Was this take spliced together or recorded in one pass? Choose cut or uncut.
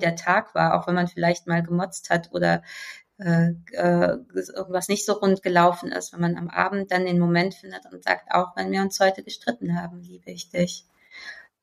uncut